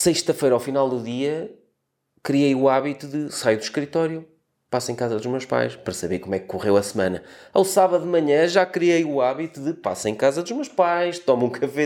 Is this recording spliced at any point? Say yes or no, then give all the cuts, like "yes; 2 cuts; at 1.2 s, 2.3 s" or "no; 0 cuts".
no; 0 cuts